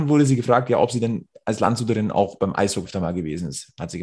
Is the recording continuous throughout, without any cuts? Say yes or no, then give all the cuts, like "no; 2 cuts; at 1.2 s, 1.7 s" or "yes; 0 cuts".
no; 1 cut; at 2.8 s